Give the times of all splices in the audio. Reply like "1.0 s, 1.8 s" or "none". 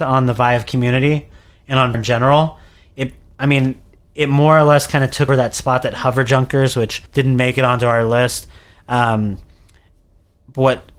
1.9 s, 5.3 s, 7.1 s